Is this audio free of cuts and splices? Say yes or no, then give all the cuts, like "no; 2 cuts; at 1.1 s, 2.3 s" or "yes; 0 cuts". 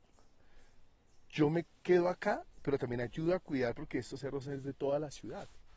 yes; 0 cuts